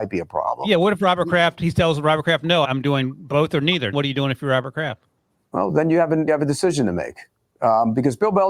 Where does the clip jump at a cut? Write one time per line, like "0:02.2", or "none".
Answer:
0:02.6
0:03.9
0:06.3